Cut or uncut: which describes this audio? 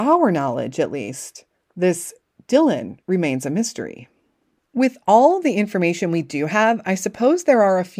uncut